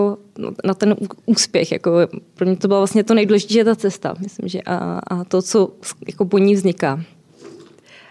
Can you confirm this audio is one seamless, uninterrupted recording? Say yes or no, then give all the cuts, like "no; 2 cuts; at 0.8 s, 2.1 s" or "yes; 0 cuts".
yes; 0 cuts